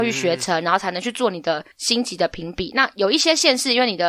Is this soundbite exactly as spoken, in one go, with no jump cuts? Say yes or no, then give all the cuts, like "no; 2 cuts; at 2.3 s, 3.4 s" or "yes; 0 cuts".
no; 1 cut; at 1.7 s